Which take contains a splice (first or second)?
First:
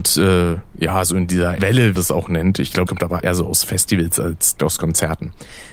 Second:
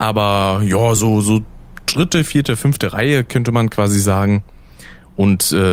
first